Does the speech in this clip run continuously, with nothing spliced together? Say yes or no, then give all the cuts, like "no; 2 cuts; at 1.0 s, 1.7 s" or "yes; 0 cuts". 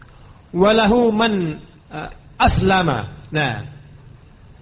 yes; 0 cuts